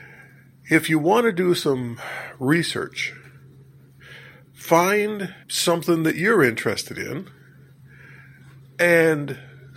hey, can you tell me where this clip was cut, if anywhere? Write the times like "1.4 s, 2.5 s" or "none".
5.4 s

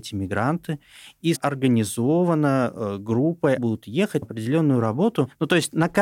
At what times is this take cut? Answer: 1.3 s, 3.6 s, 4.2 s

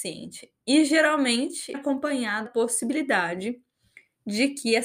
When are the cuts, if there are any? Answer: 1.7 s, 2.4 s

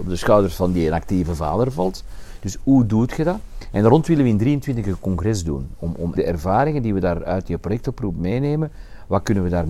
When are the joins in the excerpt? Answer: 6.2 s

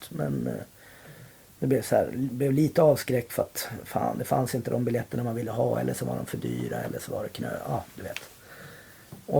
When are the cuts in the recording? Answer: none

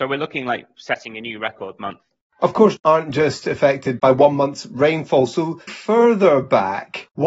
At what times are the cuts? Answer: 1.8 s, 2.8 s, 4.0 s, 5.7 s

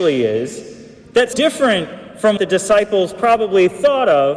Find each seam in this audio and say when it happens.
1.3 s, 2.4 s

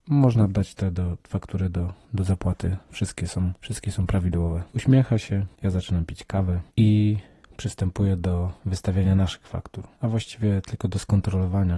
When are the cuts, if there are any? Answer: 2.0 s, 2.8 s, 3.6 s, 4.7 s, 5.5 s, 6.7 s, 8.6 s, 9.9 s

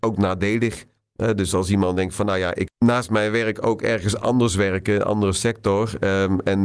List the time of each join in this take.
1.0 s, 2.7 s

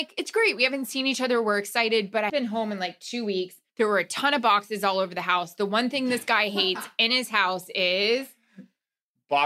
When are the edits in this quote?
2.3 s, 3.7 s

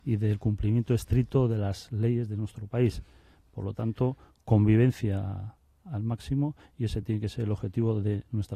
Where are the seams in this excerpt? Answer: none

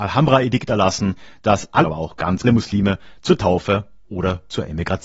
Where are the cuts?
1.8 s, 2.4 s

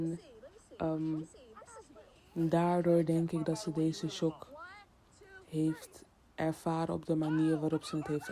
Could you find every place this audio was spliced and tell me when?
none

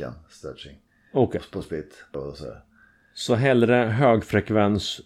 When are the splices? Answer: 2.1 s

